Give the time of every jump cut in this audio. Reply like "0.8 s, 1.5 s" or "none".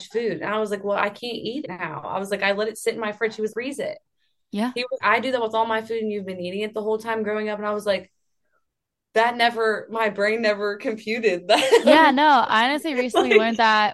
1.6 s, 3.5 s, 5.0 s, 11.8 s